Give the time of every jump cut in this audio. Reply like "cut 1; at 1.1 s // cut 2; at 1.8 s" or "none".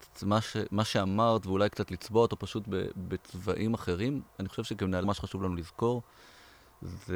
cut 1; at 5.0 s